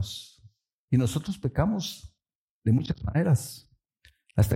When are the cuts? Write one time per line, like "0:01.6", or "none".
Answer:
none